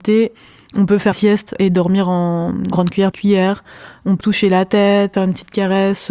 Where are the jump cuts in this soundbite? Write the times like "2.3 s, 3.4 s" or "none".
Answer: 1.1 s, 3.1 s, 4.2 s, 5.1 s